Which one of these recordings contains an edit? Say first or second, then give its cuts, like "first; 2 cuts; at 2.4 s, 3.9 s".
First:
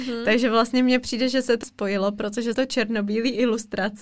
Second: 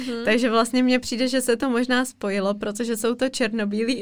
first; 2 cuts; at 1.6 s, 2.5 s